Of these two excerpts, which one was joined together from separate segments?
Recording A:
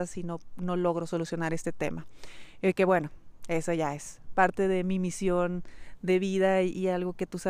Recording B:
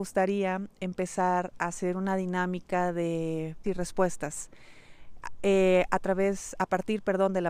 B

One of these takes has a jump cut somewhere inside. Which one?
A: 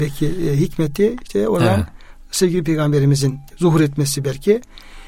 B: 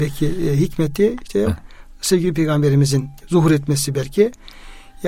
B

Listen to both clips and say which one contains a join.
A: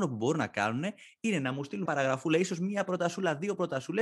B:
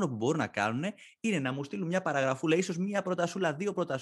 A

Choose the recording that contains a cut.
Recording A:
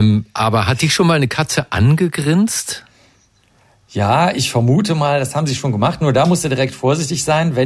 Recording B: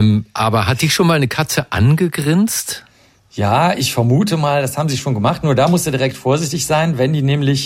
B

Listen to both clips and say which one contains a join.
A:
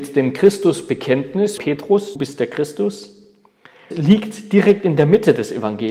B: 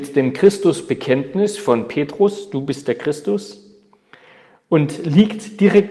A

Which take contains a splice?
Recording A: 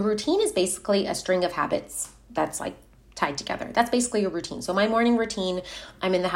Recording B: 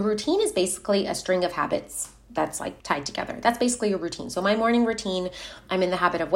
B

